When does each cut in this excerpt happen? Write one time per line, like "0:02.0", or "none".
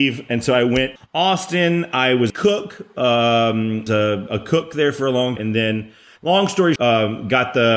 0:01.0
0:02.3
0:03.9
0:04.3
0:05.4
0:06.8